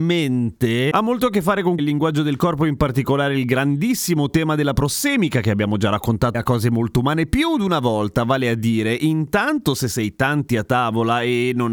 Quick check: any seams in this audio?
yes; 2 cuts; at 1.8 s, 6.3 s

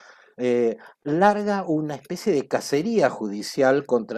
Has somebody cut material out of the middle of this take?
no; 0 cuts

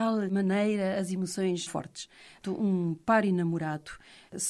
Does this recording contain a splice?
yes; 2 cuts; at 1.7 s, 2.4 s

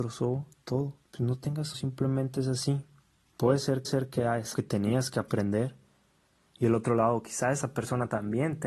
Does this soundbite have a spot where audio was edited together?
yes; 4 cuts; at 1.0 s, 1.7 s, 3.8 s, 4.5 s

